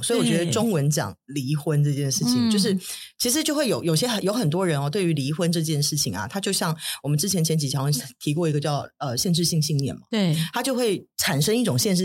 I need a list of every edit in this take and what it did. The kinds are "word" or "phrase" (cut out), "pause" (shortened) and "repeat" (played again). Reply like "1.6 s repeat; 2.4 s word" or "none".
11.1 s pause